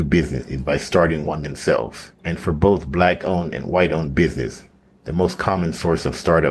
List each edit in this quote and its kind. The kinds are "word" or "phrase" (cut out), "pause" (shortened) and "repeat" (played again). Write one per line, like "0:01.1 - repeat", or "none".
none